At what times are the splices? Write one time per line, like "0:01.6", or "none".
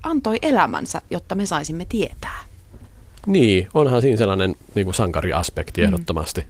none